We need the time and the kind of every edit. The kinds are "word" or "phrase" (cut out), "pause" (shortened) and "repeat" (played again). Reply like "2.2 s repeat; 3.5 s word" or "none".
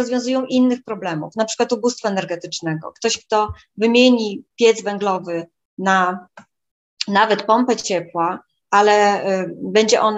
none